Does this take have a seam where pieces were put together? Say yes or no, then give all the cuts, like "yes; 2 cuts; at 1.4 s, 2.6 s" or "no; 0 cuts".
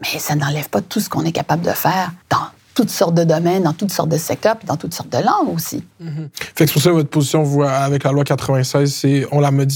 yes; 2 cuts; at 2.2 s, 5.9 s